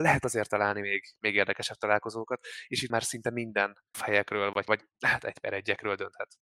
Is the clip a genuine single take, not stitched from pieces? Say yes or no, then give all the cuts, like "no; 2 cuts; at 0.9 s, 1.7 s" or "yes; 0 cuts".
no; 3 cuts; at 2.9 s, 3.9 s, 4.7 s